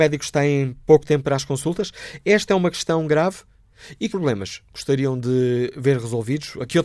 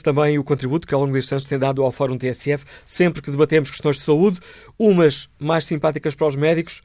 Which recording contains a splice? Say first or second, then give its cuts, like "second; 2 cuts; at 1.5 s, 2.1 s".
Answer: first; 1 cut; at 4.1 s